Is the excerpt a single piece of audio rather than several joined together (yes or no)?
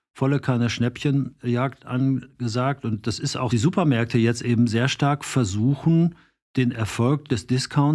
no